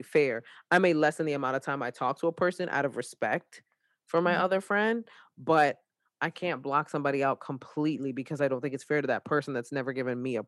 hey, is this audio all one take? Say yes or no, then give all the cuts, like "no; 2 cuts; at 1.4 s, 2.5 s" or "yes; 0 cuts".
yes; 0 cuts